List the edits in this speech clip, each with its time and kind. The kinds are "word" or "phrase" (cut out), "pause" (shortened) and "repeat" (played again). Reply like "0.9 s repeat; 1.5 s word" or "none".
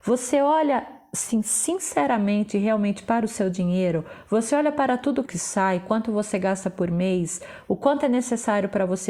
5.3 s phrase